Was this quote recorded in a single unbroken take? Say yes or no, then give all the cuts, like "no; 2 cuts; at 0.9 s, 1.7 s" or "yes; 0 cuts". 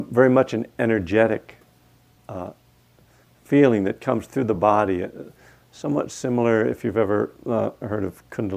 yes; 0 cuts